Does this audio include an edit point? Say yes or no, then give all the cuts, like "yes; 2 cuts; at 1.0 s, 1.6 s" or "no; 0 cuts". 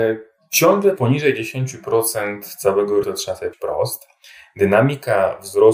yes; 3 cuts; at 1.0 s, 3.0 s, 3.5 s